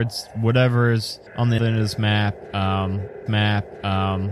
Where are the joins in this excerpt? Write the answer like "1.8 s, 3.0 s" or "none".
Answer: 1.3 s, 1.6 s, 3.3 s